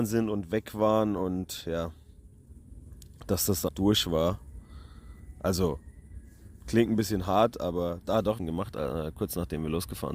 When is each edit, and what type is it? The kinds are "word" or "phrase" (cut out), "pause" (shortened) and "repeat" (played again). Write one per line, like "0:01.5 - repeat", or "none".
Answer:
0:03.7 - word
0:08.4 - phrase